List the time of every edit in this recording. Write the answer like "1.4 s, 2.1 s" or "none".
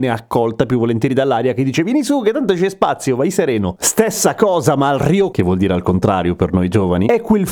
5.3 s

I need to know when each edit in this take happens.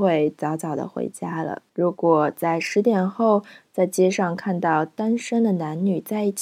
1.7 s

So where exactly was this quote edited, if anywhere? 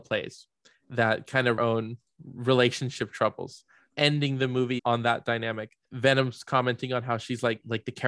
1.6 s, 3.9 s, 4.8 s

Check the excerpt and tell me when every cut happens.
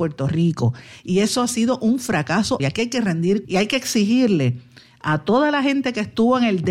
2.6 s, 3.4 s

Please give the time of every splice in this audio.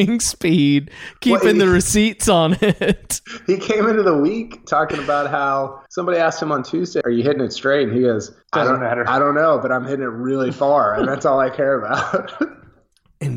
5.9 s, 7.0 s, 8.4 s

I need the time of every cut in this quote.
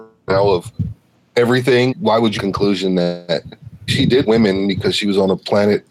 1.9 s, 2.4 s, 3.9 s, 4.2 s

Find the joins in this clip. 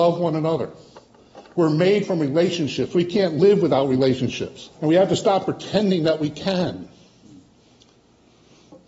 4.7 s

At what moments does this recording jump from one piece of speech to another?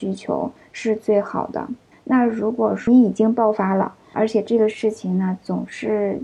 1.9 s

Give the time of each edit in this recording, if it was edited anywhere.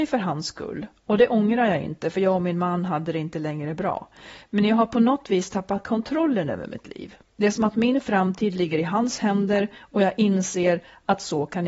none

